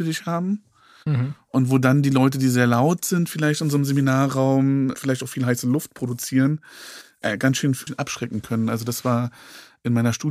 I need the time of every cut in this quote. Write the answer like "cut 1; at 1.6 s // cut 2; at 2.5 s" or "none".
cut 1; at 4.9 s // cut 2; at 7.2 s // cut 3; at 7.9 s